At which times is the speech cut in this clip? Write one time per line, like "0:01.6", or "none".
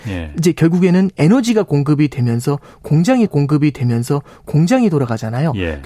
0:03.3